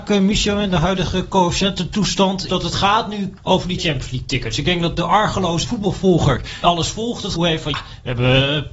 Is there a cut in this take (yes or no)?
yes